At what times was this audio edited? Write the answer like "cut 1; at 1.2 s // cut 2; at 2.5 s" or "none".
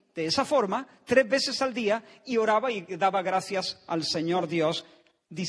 none